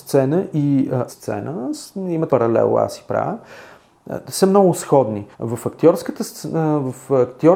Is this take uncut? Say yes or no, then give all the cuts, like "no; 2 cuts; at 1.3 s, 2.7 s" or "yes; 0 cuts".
no; 3 cuts; at 1.1 s, 2.3 s, 5.3 s